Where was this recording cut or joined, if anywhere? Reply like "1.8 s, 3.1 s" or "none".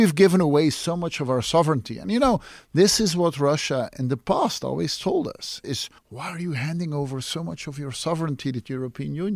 6.0 s